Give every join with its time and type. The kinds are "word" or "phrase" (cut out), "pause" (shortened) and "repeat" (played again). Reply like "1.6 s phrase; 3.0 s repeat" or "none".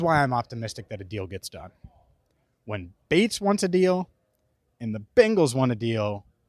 none